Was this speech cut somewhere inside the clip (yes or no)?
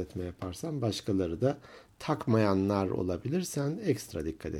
no